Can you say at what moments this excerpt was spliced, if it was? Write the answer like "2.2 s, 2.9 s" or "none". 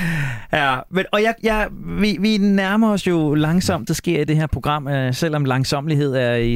3.9 s